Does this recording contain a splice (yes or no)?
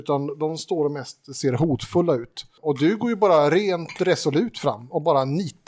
no